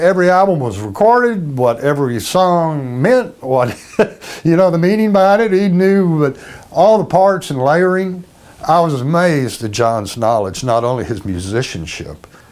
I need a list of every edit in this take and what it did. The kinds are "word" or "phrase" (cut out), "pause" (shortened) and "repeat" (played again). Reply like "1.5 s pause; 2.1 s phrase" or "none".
none